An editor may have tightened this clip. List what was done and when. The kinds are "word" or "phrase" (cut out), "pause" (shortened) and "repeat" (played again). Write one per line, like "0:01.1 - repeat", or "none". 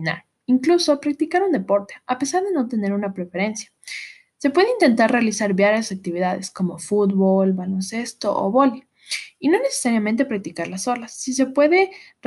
none

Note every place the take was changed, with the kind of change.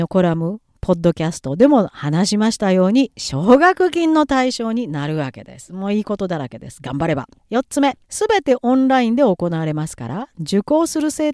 0:07.4 - pause
0:08.0 - pause

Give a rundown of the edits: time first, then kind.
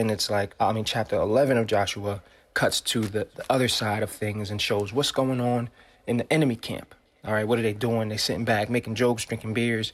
none

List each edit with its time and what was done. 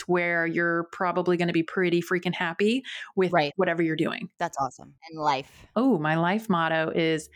none

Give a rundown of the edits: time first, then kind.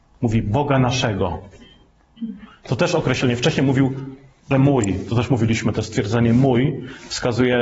0:04.5 - word

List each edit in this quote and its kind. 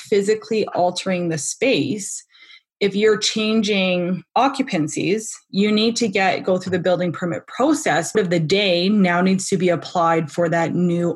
0:04.3 - pause
0:08.1 - phrase

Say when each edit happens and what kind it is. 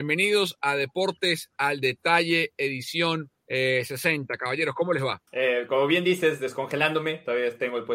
0:03.4 - pause
0:05.3 - pause

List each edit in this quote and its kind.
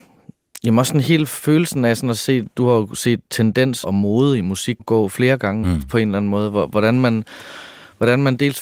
0:03.8 - word
0:04.8 - word
0:05.6 - word

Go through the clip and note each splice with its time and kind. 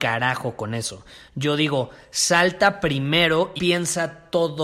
0:03.6 - word

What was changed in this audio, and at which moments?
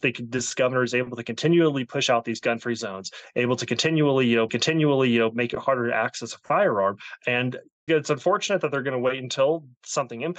0:04.5 - repeat
0:07.9 - word

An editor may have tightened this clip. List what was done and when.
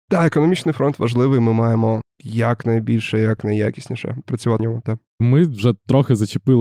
0:02.1 - pause
0:03.4 - phrase
0:04.6 - word
0:05.1 - pause

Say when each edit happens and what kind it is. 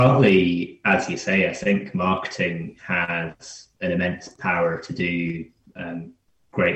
none

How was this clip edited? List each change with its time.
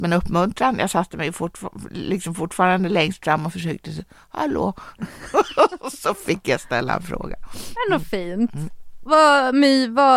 none

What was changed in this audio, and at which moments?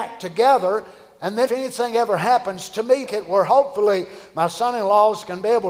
0:01.5 - word
0:03.1 - word

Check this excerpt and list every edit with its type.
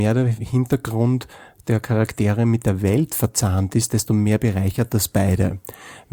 none

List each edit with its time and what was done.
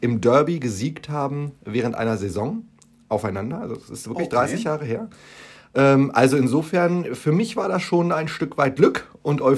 none

